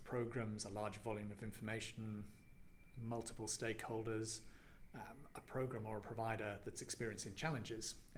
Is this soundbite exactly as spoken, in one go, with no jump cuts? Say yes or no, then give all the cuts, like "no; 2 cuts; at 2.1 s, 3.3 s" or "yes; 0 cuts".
yes; 0 cuts